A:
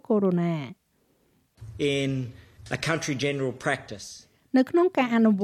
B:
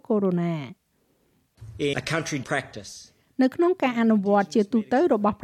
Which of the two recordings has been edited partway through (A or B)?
B